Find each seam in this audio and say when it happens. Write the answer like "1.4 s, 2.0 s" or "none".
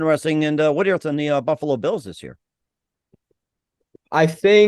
1.0 s